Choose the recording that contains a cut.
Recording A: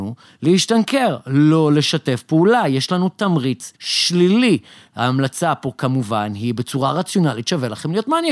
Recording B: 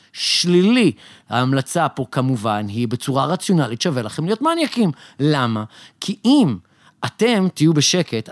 A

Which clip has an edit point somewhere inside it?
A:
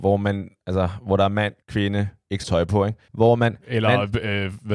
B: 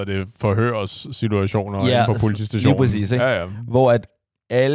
A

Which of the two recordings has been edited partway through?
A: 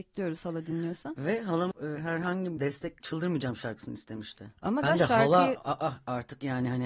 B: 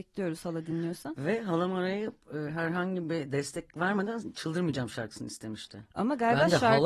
A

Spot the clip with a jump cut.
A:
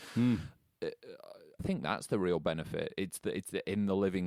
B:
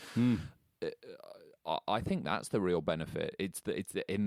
A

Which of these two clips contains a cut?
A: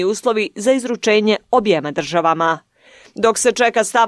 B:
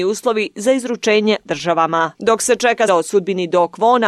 B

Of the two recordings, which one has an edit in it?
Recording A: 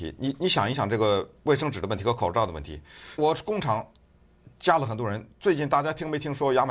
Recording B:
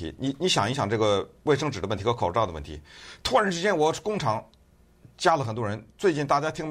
A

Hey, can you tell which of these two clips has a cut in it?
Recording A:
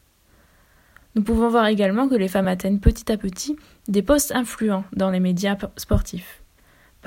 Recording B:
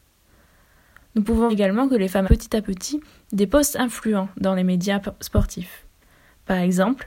B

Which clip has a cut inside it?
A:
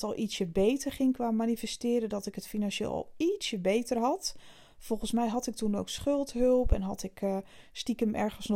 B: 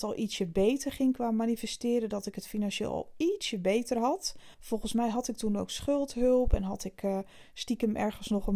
B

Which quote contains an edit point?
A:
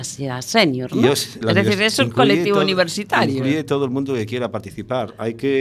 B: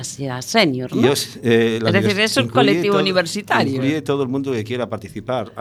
A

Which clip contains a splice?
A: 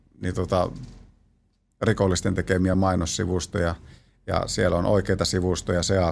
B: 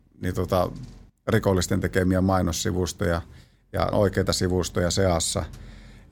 B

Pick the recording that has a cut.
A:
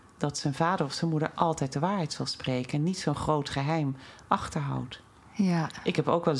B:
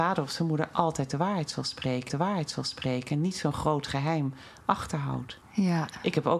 B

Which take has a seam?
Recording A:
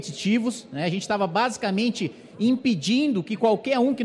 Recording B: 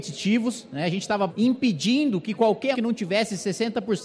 B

